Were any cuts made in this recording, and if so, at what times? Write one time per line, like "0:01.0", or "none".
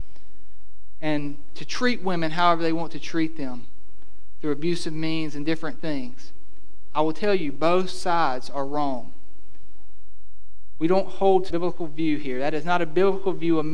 0:11.5